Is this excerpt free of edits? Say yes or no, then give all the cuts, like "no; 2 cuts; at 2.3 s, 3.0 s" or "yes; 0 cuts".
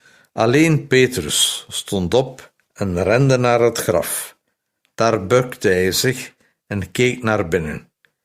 yes; 0 cuts